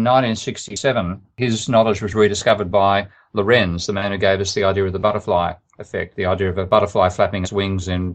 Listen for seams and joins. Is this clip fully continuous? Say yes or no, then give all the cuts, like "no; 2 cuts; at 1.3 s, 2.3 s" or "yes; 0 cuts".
yes; 0 cuts